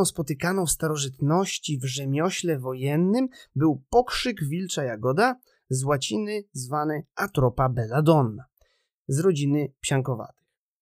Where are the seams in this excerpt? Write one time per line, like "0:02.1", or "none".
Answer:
none

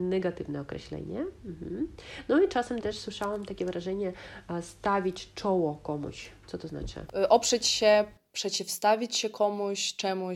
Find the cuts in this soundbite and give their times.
0:02.8

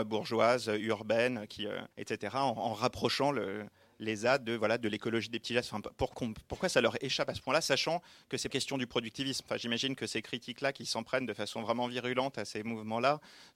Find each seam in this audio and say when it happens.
0:01.9
0:06.1
0:08.5

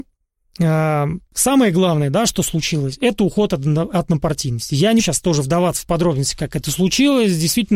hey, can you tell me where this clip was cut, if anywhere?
0:01.3
0:05.0

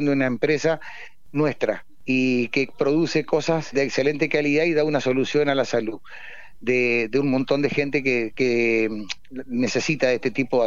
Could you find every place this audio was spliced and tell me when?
0:03.7
0:08.3

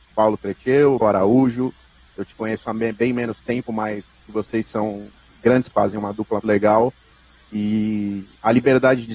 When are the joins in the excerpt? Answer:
0:01.0
0:04.2
0:05.7
0:06.4

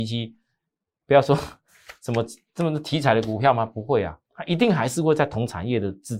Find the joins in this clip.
0:04.2

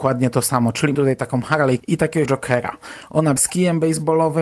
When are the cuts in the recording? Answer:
0:00.9
0:01.8
0:02.3
0:03.4

